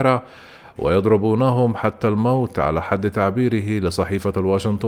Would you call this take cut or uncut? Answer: uncut